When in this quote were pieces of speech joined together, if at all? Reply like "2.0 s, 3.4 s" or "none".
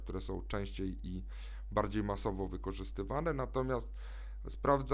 none